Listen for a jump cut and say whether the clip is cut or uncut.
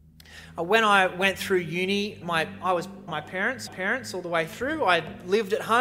cut